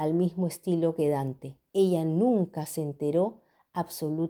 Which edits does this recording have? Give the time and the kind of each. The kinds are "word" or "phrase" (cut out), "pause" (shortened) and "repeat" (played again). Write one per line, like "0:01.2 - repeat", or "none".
none